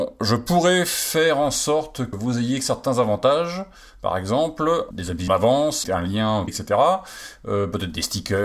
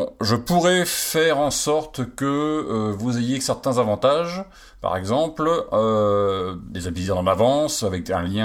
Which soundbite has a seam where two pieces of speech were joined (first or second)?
first